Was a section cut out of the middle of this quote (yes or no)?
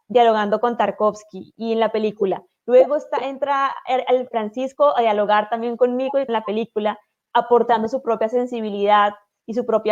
yes